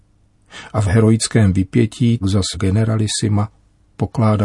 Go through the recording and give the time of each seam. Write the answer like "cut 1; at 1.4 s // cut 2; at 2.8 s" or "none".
cut 1; at 2.2 s // cut 2; at 2.5 s